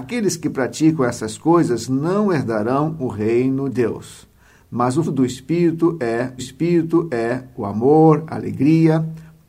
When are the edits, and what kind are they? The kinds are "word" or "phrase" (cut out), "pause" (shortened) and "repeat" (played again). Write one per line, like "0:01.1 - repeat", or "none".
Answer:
0:03.7 - word
0:05.0 - word
0:06.4 - repeat